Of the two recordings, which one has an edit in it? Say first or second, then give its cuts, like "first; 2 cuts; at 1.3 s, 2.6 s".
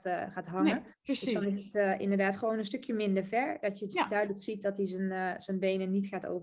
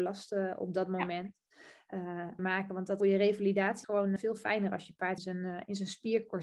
second; 5 cuts; at 2.4 s, 3.0 s, 3.8 s, 4.2 s, 5.2 s